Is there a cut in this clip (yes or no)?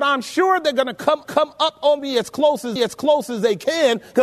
yes